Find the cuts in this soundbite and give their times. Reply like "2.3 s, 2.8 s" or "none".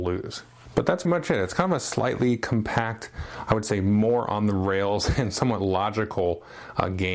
1.0 s

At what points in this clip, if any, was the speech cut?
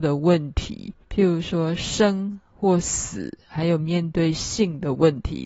1.0 s

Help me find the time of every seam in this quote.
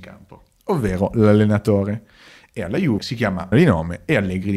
3.0 s, 3.5 s

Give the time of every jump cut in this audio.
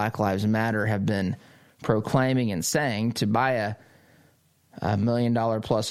none

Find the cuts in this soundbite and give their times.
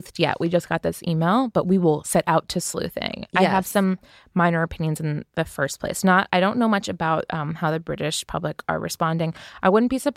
none

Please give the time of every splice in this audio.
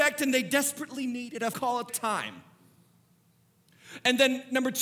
1.5 s, 1.9 s

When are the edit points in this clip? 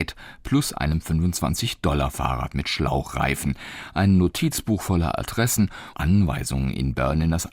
5.9 s

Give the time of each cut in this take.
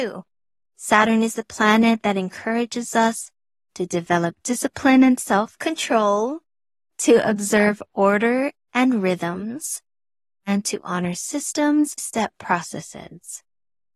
12.0 s

